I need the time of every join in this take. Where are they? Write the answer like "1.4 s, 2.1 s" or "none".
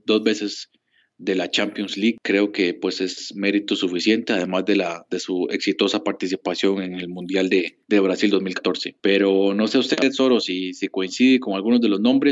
7.8 s

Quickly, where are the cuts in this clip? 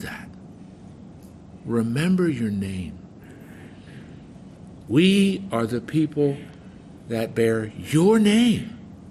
none

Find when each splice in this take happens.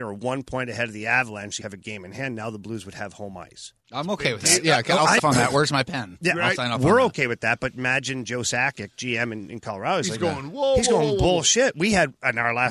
1.6 s, 3.8 s, 5.2 s

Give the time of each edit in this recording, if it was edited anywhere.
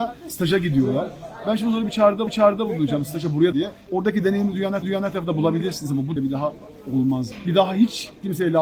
2.3 s, 3.5 s, 4.8 s, 6.2 s

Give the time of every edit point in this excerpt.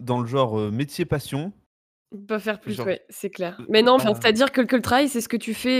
4.0 s, 4.7 s

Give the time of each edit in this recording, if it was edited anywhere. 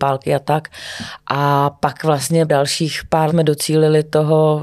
2.5 s, 3.3 s

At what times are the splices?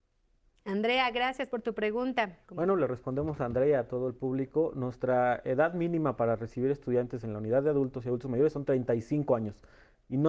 2.4 s

